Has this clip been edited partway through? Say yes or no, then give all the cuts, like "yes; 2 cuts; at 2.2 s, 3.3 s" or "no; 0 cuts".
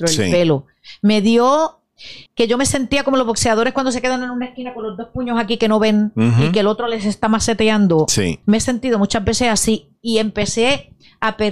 yes; 2 cuts; at 2.3 s, 8.4 s